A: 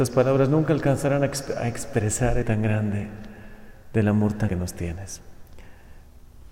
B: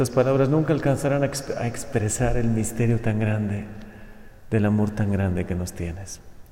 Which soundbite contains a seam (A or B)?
A